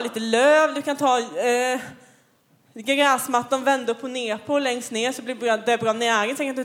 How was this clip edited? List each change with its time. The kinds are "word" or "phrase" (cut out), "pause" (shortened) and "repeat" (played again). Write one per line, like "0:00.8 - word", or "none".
none